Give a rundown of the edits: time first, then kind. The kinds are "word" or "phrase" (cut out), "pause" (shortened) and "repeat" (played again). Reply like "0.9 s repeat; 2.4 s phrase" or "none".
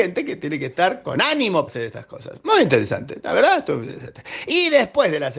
1.7 s word